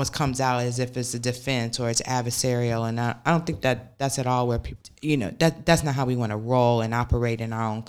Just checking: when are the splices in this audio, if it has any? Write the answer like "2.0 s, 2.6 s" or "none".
4.8 s